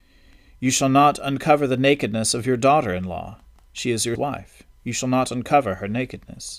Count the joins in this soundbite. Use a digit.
1